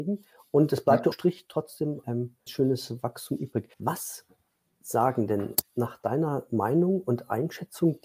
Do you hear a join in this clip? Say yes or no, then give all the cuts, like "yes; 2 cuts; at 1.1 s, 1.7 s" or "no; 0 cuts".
yes; 4 cuts; at 1.1 s, 2.0 s, 2.5 s, 3.7 s